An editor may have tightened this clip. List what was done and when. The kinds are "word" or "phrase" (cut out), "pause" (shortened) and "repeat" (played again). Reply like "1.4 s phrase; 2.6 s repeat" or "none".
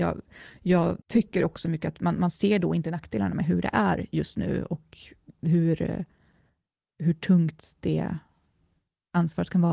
1.0 s pause; 5.3 s pause